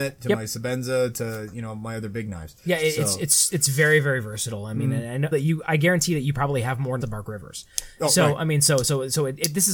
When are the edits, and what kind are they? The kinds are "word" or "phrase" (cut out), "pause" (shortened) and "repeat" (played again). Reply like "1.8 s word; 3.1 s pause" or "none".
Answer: 5.3 s phrase; 7.0 s phrase